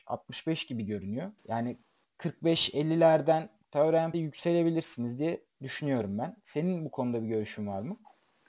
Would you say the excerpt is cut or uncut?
cut